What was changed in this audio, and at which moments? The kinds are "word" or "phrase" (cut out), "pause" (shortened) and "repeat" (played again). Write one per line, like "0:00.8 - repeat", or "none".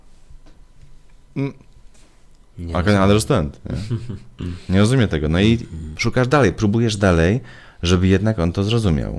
none